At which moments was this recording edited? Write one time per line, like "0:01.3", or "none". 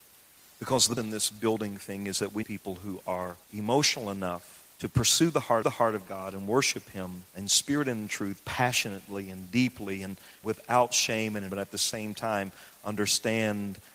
0:01.0
0:02.4
0:03.4
0:04.7
0:05.6
0:07.3
0:10.4
0:11.5